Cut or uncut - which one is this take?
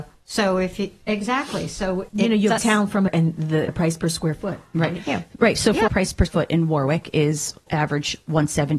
cut